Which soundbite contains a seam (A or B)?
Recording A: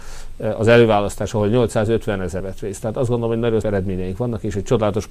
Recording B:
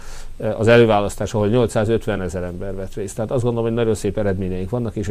A